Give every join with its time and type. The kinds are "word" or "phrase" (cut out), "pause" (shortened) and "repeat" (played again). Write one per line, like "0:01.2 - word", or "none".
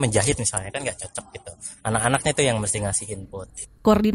none